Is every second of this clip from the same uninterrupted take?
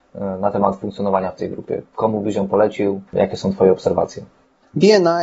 no; 1 cut; at 3.1 s

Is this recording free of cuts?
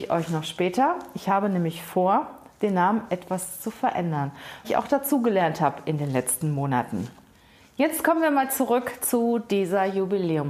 no; 1 cut; at 4.6 s

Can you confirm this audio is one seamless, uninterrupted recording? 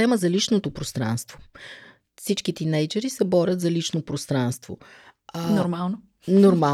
yes; 0 cuts

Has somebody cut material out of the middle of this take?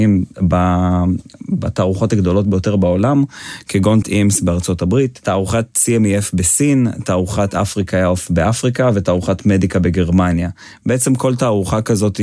yes; 1 cut; at 4.0 s

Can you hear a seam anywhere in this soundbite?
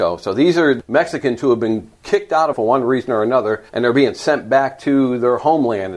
yes; 2 cuts; at 2.5 s, 3.7 s

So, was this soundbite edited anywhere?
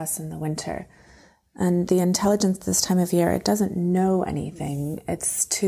no; 0 cuts

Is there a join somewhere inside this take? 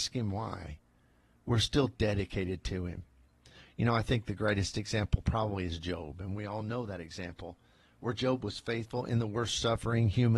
no; 0 cuts

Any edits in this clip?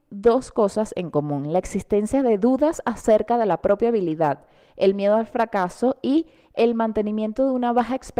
no; 0 cuts

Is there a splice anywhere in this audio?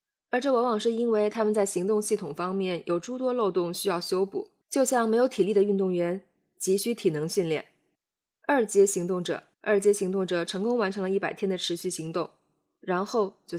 yes; 3 cuts; at 4.6 s, 8.0 s, 9.5 s

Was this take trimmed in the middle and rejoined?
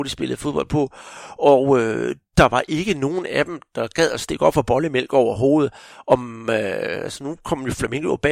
no; 0 cuts

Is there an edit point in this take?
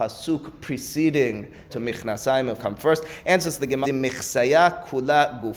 yes; 3 cuts; at 1.7 s, 2.6 s, 3.8 s

